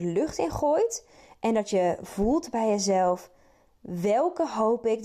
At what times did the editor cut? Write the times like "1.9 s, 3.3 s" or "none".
none